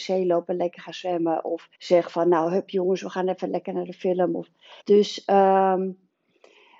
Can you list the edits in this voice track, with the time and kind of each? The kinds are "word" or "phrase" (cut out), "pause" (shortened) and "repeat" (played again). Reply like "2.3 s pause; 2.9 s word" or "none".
1.7 s pause; 4.8 s pause

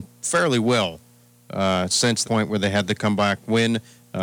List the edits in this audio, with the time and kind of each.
2.2 s word

